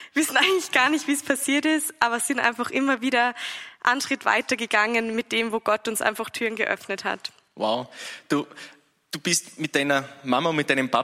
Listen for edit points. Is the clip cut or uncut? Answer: uncut